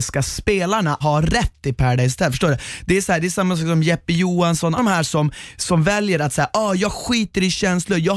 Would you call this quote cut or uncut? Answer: cut